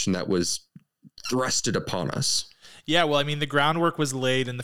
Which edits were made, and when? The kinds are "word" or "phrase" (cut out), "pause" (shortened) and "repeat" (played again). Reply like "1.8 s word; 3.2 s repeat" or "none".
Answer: none